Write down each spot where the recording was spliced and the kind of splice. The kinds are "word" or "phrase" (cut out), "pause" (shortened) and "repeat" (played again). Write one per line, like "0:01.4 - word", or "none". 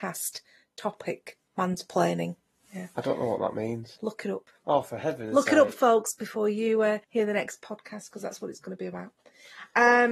0:01.5 - pause
0:04.0 - word
0:07.0 - pause